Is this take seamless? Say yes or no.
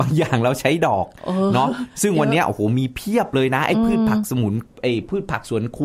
no